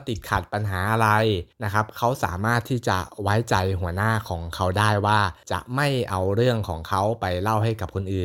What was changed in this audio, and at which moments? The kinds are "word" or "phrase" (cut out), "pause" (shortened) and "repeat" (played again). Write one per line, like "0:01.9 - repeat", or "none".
0:01.5 - pause